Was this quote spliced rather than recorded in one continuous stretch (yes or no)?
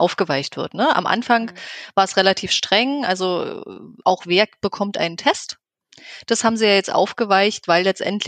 no